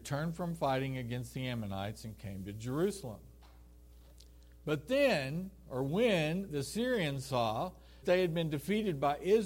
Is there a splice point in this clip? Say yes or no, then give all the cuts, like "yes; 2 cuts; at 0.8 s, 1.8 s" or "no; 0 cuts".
yes; 1 cut; at 8.0 s